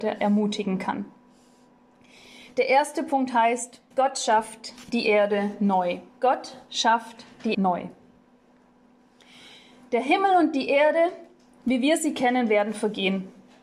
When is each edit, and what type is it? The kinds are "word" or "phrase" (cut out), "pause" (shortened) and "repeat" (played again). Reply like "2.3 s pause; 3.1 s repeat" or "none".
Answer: 3.9 s pause; 6.1 s pause; 7.5 s word